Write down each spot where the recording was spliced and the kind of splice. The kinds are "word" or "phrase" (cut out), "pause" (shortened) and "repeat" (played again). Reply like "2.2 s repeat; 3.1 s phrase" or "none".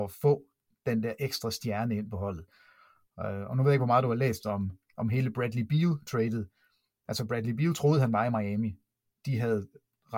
none

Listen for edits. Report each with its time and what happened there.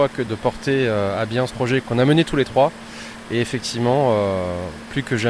1.5 s word

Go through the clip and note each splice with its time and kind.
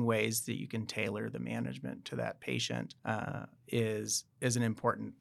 3.0 s pause

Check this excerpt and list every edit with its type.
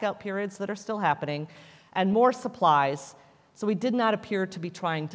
none

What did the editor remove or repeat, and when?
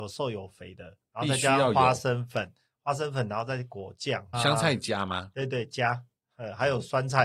4.3 s word

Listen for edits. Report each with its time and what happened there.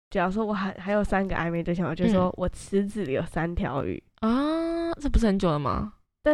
4.1 s pause

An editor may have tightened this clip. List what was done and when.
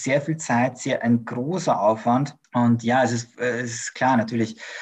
2.4 s pause

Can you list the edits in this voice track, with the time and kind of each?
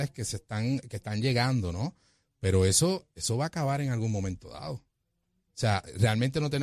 none

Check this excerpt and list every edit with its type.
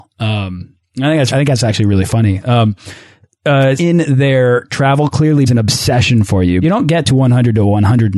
1.3 s word; 3.8 s word; 5.5 s word; 6.6 s word

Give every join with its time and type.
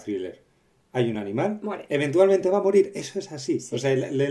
none

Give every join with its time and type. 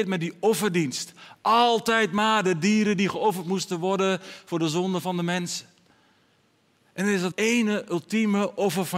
7.3 s word

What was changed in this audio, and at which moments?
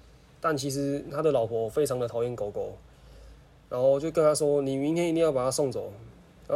none

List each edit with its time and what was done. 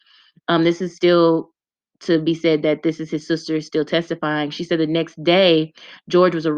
none

